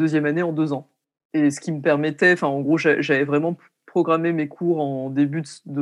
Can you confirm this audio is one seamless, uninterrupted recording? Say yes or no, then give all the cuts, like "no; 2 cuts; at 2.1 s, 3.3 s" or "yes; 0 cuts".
yes; 0 cuts